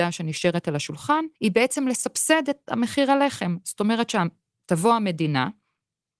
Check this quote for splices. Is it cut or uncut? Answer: cut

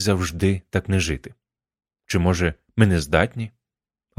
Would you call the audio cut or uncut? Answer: uncut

